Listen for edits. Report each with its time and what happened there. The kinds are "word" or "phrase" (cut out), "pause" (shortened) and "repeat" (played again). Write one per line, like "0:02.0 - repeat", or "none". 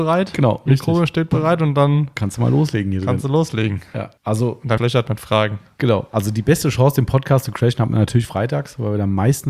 0:04.2 - pause
0:04.8 - phrase